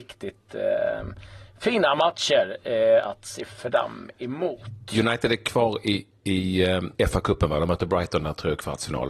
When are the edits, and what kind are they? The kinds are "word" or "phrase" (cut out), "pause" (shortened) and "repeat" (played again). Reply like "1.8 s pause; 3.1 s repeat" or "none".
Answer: 6.1 s pause; 6.9 s pause